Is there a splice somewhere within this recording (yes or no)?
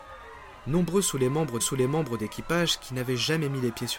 yes